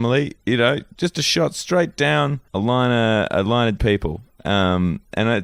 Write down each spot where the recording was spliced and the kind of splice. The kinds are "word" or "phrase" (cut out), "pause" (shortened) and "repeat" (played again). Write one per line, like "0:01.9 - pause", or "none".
0:02.5 - pause
0:03.8 - word